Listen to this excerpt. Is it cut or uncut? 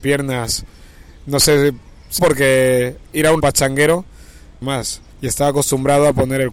cut